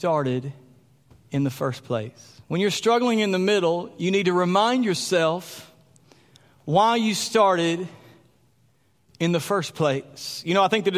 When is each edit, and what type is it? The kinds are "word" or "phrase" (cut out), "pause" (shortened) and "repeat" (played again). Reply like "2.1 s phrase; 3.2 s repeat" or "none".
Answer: 2.4 s pause